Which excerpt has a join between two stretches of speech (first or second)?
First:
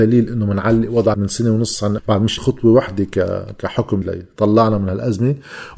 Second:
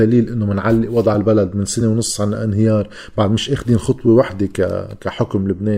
first